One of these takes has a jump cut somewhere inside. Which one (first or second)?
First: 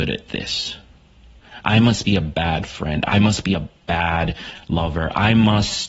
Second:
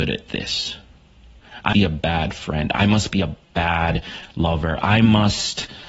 second